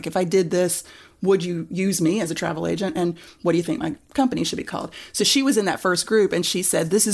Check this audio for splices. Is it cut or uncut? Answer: uncut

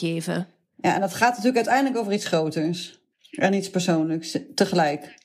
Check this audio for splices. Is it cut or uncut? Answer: uncut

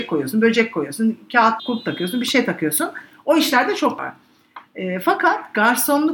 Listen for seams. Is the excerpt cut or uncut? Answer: cut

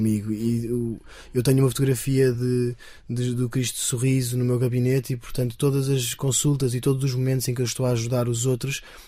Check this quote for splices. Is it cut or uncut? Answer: uncut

